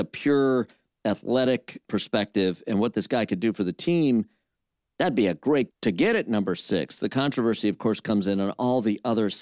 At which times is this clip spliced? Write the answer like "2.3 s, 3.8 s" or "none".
5.7 s